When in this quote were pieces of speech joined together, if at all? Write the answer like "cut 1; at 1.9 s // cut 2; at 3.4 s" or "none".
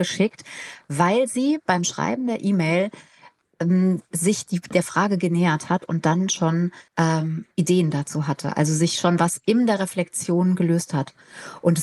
cut 1; at 6.9 s